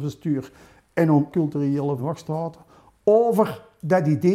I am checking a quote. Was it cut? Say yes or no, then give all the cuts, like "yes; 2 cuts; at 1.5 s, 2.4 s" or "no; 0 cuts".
yes; 2 cuts; at 1.3 s, 2.0 s